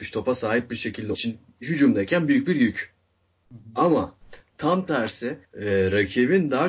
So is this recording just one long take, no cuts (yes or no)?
no